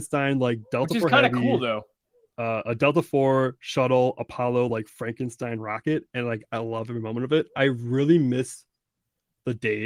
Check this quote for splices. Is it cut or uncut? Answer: uncut